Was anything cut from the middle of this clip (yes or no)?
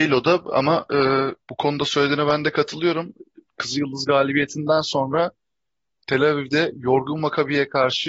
yes